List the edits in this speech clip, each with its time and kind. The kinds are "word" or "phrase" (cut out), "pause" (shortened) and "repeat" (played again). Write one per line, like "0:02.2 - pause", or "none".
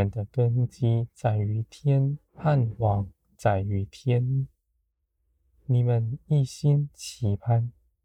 0:02.3 - pause